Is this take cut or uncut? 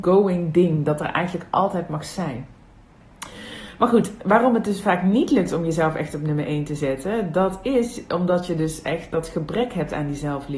uncut